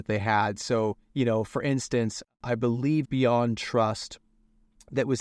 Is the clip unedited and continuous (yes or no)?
no